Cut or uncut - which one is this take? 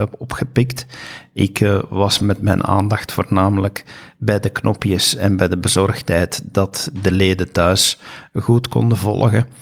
uncut